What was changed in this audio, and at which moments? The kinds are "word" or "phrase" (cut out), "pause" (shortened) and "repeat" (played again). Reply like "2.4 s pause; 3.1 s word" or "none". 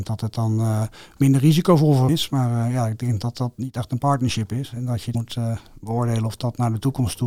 2.1 s word; 5.1 s word